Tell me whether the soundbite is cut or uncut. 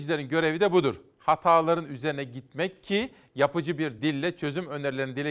uncut